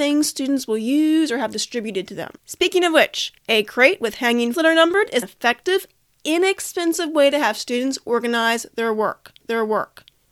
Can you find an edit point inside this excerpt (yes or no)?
yes